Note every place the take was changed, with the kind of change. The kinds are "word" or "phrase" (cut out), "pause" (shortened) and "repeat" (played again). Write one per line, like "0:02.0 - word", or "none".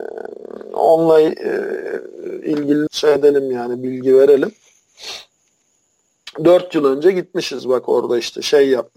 0:02.9 - phrase